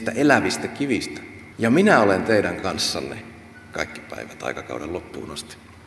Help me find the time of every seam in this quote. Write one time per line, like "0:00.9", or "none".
0:01.5